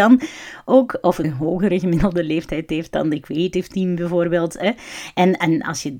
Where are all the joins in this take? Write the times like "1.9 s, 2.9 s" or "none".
1.2 s